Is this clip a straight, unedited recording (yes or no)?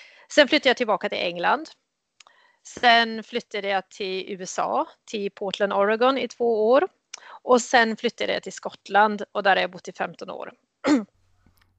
yes